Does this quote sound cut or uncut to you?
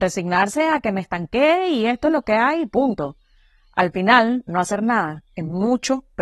uncut